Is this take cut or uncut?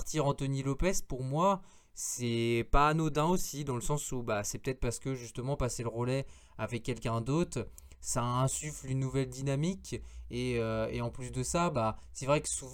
uncut